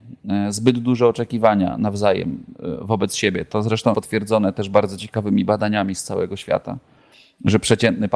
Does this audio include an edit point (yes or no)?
yes